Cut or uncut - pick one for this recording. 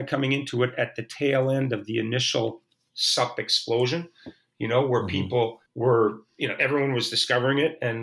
uncut